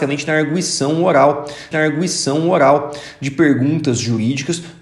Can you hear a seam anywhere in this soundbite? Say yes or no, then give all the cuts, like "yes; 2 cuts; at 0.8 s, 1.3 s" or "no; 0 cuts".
yes; 1 cut; at 1.7 s